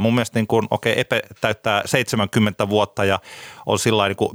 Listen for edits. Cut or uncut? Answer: uncut